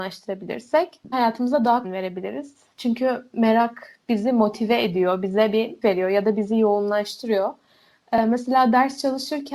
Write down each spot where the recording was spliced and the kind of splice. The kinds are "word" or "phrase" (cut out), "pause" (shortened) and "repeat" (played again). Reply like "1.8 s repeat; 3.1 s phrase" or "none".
1.1 s word; 1.8 s phrase; 5.8 s word